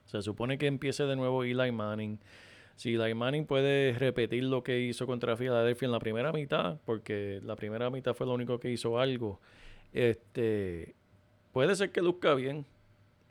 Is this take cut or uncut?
uncut